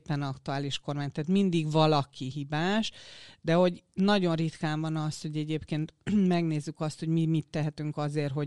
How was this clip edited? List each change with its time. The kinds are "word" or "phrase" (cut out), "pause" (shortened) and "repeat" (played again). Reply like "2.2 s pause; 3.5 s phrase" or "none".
none